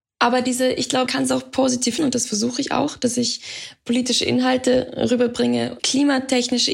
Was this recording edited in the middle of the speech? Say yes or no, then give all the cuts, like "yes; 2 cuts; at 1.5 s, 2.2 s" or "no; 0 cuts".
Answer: yes; 3 cuts; at 1.1 s, 2.0 s, 5.8 s